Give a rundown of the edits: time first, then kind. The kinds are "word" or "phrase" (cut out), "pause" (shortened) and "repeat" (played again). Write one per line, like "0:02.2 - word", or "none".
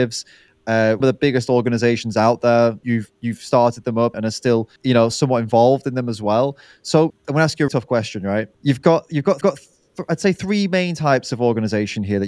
0:01.0 - word
0:02.8 - word
0:04.1 - word
0:04.8 - pause
0:07.1 - word
0:07.7 - word
0:08.5 - pause
0:09.4 - repeat